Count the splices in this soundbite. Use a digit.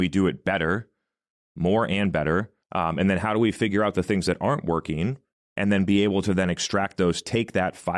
2